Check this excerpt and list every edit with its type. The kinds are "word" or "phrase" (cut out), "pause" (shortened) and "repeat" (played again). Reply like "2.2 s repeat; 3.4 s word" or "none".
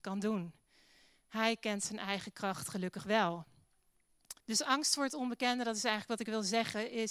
4.4 s pause